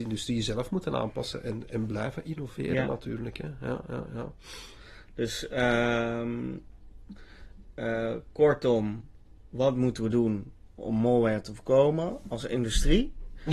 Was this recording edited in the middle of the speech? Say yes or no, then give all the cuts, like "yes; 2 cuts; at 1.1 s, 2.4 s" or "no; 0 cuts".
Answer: no; 0 cuts